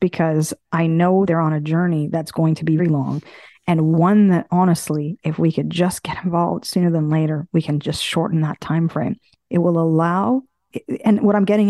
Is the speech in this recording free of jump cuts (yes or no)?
no